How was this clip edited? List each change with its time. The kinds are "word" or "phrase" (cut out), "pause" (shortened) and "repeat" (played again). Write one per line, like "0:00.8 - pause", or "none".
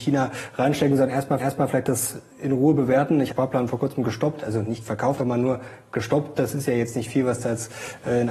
0:01.4 - repeat
0:02.3 - pause
0:03.3 - phrase
0:05.2 - word